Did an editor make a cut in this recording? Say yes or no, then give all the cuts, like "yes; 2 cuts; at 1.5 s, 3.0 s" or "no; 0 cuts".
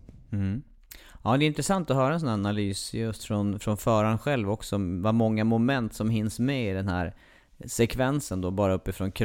no; 0 cuts